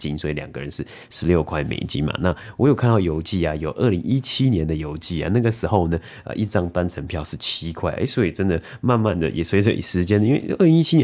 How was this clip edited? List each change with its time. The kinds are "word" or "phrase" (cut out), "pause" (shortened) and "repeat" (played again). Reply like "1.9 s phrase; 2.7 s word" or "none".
none